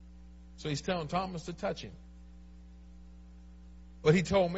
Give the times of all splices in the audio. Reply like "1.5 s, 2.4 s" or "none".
none